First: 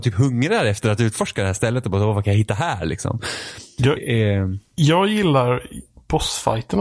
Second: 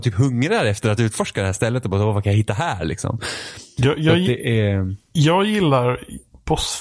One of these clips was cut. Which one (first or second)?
first